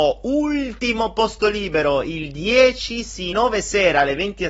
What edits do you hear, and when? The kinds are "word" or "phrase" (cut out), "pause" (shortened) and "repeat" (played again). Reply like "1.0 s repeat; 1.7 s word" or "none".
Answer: 3.3 s phrase